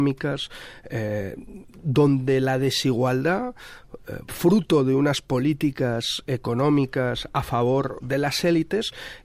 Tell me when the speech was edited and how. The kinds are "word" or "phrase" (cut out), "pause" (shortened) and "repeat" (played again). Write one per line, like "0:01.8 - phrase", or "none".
0:08.0 - word

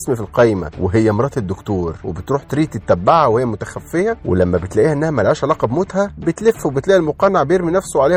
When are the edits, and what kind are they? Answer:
none

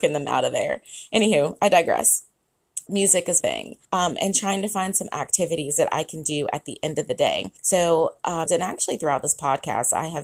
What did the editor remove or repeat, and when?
0:02.9 - word
0:03.4 - word
0:03.8 - pause
0:07.6 - pause
0:08.5 - phrase

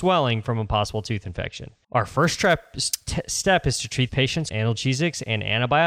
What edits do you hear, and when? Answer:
0:04.1 - word
0:04.5 - word

